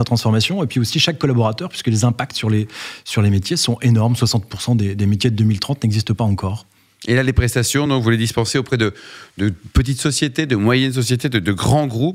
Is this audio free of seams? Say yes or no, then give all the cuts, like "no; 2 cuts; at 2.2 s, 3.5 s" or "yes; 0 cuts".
yes; 0 cuts